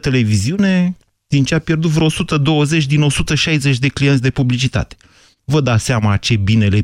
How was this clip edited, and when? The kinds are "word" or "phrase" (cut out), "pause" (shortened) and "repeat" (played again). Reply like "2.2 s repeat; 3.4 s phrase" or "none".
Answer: 1.5 s phrase